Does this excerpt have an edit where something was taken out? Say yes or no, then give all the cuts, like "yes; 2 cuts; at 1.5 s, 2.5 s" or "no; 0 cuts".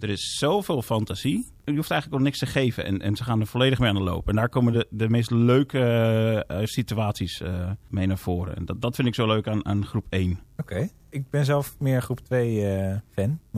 no; 0 cuts